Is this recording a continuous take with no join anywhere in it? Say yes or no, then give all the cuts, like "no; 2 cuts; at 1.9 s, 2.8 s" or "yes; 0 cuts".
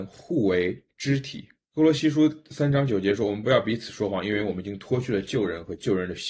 no; 1 cut; at 1.6 s